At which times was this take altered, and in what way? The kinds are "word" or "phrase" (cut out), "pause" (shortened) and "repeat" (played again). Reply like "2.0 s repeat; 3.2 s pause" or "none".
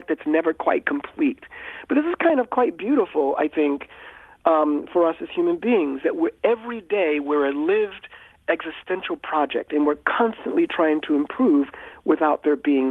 none